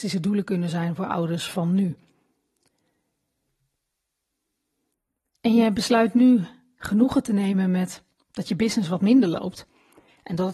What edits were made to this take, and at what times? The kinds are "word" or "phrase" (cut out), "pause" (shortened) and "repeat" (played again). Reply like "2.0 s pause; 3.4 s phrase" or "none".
none

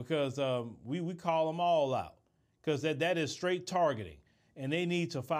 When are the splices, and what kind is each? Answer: none

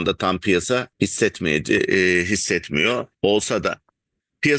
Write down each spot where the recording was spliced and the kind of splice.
0.9 s pause; 3.1 s pause

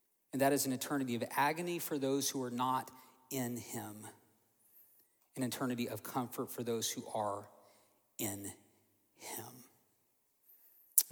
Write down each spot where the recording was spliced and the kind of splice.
none

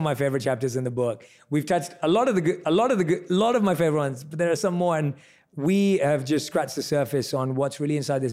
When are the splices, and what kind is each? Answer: 2.6 s repeat; 4.6 s word

